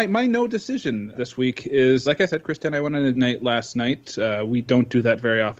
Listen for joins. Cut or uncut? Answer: cut